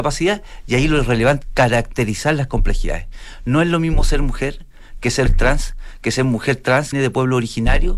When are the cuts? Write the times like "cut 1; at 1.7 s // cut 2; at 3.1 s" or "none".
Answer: cut 1; at 1.4 s // cut 2; at 5.3 s // cut 3; at 6.9 s